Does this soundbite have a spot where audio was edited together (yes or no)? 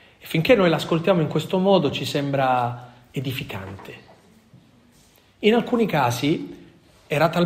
no